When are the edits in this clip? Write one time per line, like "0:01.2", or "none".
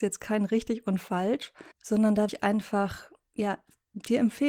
0:01.7
0:02.3